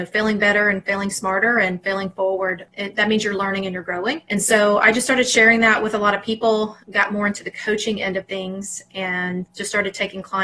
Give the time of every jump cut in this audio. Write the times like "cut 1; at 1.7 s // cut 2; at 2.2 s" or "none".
cut 1; at 4.2 s // cut 2; at 6.8 s